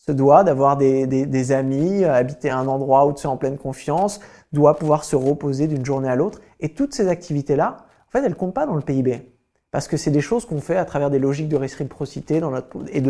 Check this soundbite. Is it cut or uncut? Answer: uncut